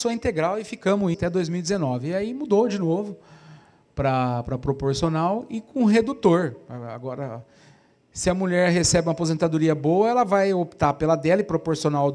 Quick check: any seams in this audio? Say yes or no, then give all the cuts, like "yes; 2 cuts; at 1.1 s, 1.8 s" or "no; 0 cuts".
yes; 1 cut; at 1.1 s